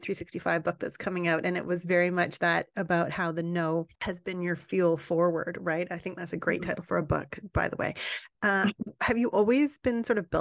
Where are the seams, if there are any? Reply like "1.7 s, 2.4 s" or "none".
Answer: 3.9 s, 8.3 s